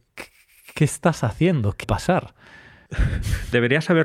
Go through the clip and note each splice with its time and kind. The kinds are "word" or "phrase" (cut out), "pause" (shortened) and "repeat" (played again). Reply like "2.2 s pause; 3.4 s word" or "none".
1.8 s phrase